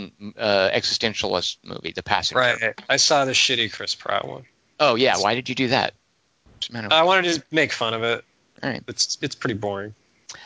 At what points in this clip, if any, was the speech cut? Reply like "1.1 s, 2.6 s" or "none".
none